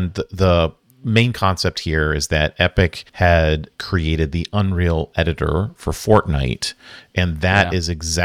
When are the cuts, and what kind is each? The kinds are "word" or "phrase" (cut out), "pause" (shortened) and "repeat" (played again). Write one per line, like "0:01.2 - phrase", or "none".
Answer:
0:03.1 - pause